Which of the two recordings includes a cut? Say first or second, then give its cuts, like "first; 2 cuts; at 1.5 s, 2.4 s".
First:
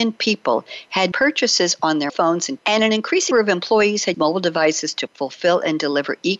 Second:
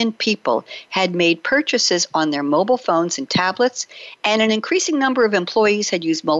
first; 6 cuts; at 1.1 s, 2.1 s, 2.6 s, 3.3 s, 4.1 s, 5.1 s